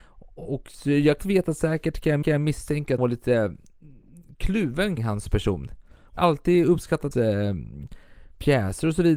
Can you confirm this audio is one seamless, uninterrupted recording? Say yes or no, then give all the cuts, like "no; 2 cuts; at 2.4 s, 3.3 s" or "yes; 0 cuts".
no; 6 cuts; at 1.2 s, 2.2 s, 3.0 s, 5.0 s, 6.2 s, 7.1 s